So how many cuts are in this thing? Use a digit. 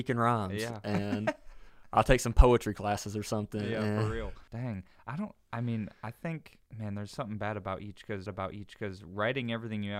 3